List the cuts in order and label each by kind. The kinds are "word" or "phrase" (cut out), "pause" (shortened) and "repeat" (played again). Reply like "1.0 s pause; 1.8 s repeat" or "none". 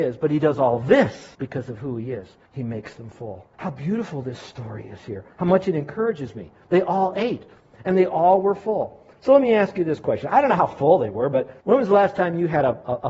1.3 s pause; 2.5 s pause; 3.5 s pause; 5.3 s pause; 11.6 s pause

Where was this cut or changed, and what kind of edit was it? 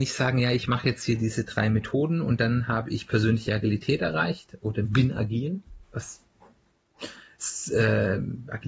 5.8 s pause

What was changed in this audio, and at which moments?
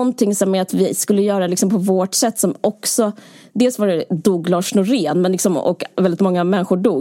none

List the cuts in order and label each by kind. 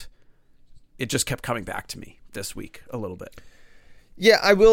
none

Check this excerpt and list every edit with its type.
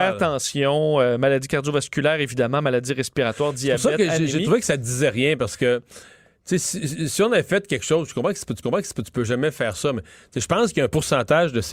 8.6 s repeat

